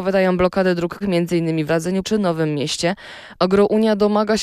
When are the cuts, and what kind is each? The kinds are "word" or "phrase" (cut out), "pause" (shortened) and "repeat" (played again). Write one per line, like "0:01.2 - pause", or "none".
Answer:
0:01.0 - word
0:01.7 - word
0:02.0 - word